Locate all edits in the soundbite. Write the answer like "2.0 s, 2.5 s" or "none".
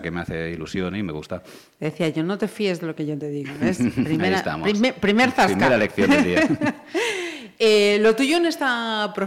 none